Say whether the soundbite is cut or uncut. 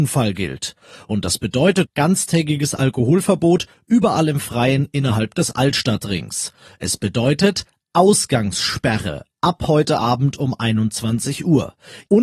cut